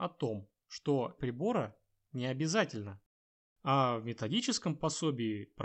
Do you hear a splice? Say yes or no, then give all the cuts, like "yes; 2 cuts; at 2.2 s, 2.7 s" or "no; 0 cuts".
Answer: yes; 1 cut; at 1.2 s